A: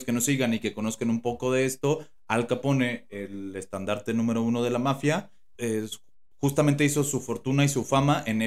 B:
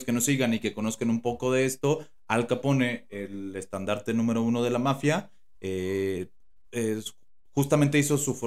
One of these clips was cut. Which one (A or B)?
A